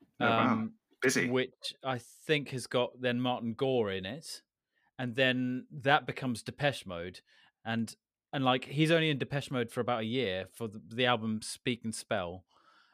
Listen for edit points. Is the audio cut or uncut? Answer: uncut